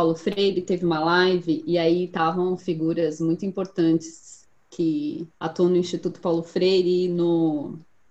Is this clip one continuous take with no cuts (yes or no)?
no